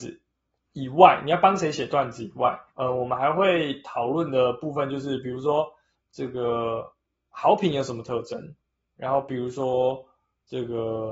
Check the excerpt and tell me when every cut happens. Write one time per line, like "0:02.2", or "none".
0:02.7
0:06.0
0:08.7